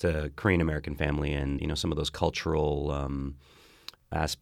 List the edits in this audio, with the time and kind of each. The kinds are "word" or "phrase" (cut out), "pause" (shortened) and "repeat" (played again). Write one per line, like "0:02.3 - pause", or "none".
0:01.6 - word